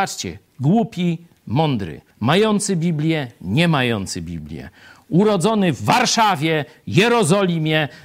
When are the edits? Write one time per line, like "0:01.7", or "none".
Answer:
0:02.1